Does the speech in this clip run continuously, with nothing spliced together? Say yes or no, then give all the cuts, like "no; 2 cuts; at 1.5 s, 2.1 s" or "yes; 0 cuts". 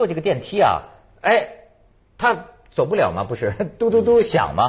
yes; 0 cuts